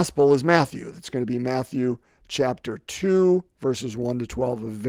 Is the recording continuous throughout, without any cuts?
yes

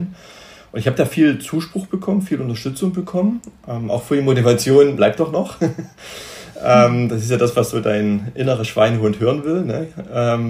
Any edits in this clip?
yes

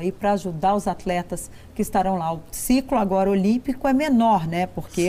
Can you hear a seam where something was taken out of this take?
no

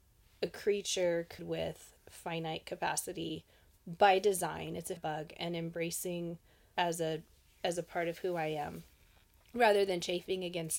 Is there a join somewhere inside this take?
yes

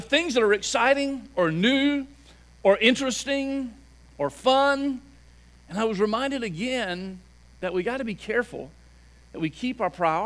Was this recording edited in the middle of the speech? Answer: no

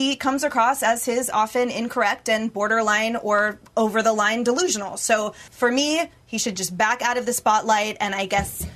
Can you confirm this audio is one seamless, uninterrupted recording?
no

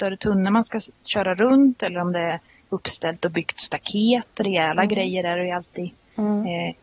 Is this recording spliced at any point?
no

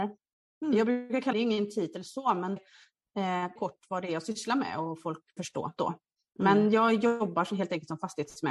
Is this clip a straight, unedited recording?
no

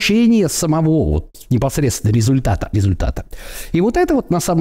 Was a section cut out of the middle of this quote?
yes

